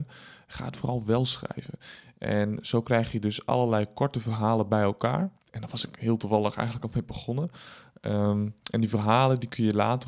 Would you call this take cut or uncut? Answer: cut